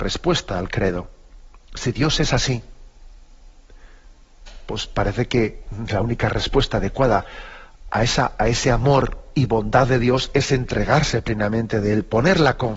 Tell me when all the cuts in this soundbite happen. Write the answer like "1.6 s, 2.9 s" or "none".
1.6 s

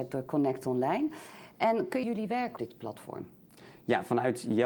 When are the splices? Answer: 2.0 s, 2.6 s

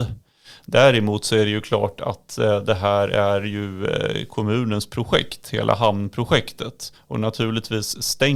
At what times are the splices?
7.0 s

